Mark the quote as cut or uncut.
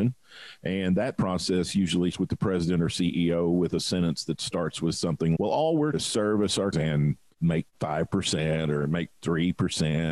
cut